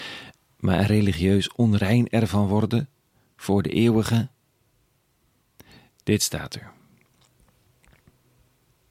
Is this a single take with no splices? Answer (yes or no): yes